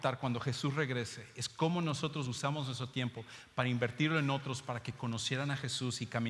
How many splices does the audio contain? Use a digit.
0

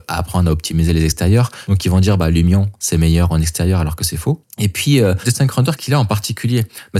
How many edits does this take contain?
1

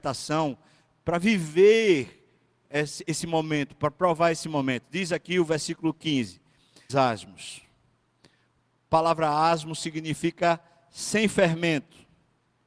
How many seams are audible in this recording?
1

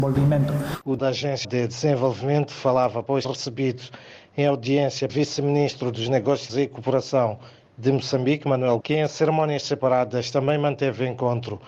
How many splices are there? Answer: 6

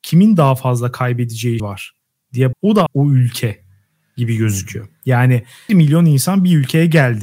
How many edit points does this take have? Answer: 4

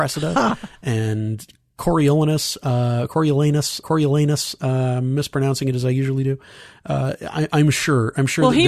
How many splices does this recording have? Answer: 1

